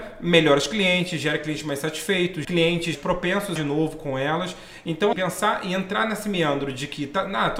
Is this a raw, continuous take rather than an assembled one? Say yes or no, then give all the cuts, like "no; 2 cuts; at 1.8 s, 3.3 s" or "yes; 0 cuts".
no; 4 cuts; at 2.4 s, 2.9 s, 3.6 s, 5.1 s